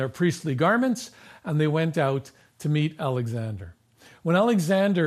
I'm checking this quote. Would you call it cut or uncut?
uncut